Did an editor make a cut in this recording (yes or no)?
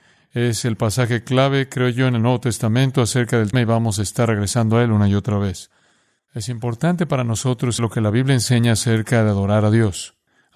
yes